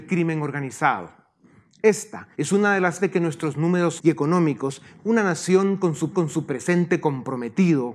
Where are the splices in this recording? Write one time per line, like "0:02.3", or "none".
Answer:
0:02.3
0:03.0
0:04.0
0:05.0
0:06.1